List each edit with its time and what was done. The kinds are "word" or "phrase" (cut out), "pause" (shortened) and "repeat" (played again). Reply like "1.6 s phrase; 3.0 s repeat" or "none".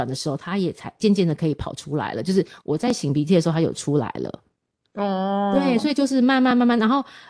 none